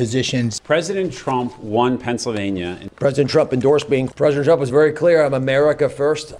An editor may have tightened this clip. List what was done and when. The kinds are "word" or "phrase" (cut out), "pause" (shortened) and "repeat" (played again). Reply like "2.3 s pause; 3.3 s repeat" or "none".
none